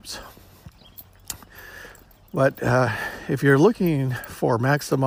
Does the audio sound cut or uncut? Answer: uncut